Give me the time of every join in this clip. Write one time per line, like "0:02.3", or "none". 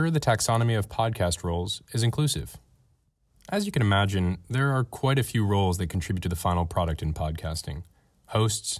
none

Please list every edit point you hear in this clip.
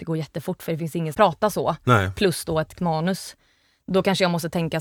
0:01.1
0:02.7

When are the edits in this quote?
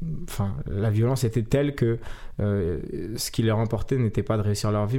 none

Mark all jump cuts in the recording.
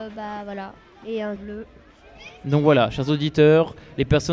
0:01.4

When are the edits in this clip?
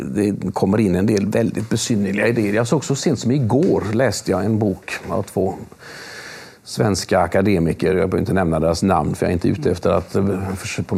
none

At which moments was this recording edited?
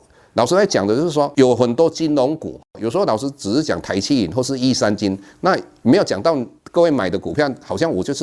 0:06.6

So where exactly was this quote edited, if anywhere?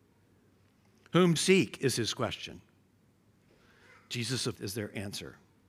0:01.4
0:04.5

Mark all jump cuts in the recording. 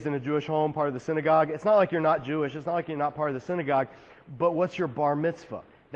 none

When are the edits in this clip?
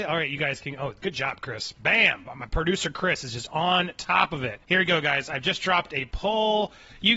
0:04.6

